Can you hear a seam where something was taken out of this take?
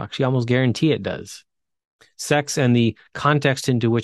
no; 0 cuts

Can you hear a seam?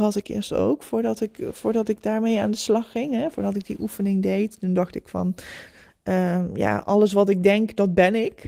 no; 0 cuts

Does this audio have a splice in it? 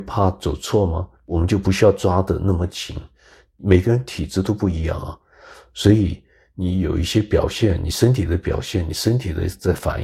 yes; 1 cut; at 1.2 s

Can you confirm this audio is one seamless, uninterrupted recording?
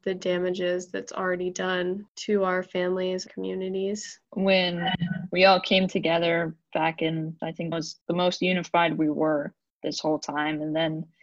no; 3 cuts; at 3.3 s, 7.4 s, 7.7 s

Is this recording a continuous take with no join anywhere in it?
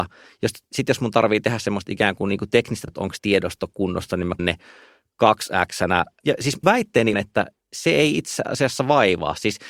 no; 6 cuts; at 2.9 s, 3.2 s, 4.4 s, 6.2 s, 6.6 s, 7.1 s

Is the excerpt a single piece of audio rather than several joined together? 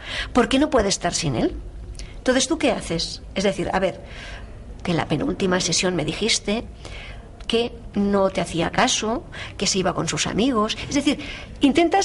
no; 1 cut; at 4.8 s

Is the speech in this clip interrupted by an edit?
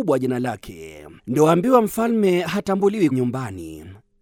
yes; 2 cuts; at 1.2 s, 3.1 s

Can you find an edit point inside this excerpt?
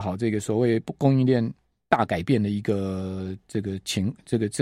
no; 0 cuts

